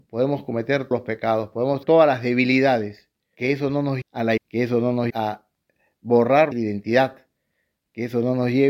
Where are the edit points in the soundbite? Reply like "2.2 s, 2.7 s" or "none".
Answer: 0.9 s, 1.8 s, 3.3 s, 4.0 s, 4.4 s, 5.1 s, 6.5 s